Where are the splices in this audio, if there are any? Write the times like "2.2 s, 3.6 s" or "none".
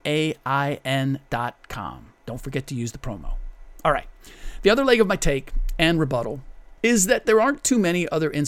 6.8 s